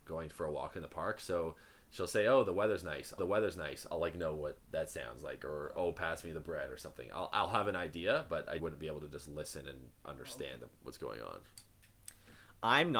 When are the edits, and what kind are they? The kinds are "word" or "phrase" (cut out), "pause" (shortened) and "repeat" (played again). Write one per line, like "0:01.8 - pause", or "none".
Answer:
0:03.2 - repeat
0:04.6 - pause
0:08.6 - word